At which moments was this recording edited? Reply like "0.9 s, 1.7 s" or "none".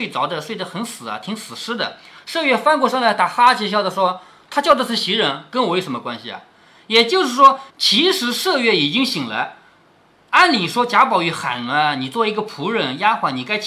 7.7 s